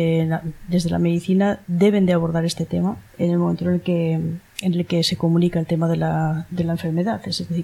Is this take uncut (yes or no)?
no